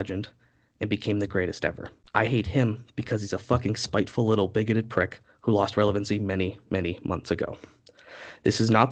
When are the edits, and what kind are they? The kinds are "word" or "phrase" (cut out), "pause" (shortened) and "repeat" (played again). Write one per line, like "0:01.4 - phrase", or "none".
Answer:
0:02.0 - pause